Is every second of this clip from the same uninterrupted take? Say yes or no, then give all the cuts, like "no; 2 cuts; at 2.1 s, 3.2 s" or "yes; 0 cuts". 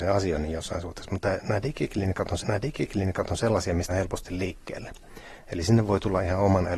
no; 2 cuts; at 2.4 s, 3.9 s